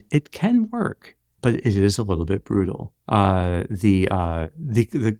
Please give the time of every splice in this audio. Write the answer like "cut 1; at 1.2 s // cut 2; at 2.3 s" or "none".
cut 1; at 1.4 s // cut 2; at 3.0 s